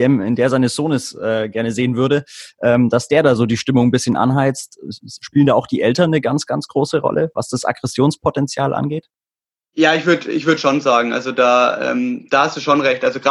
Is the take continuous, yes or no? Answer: yes